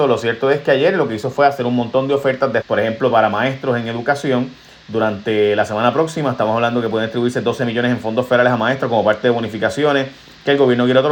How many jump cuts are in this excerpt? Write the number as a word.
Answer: one